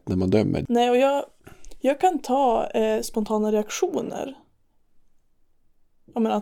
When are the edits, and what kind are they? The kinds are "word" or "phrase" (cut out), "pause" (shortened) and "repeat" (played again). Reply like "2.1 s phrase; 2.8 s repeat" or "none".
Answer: none